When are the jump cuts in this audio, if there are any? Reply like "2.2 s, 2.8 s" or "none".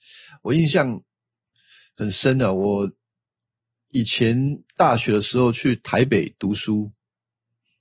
none